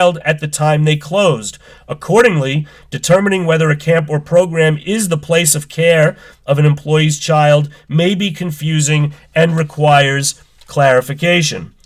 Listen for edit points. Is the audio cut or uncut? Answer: uncut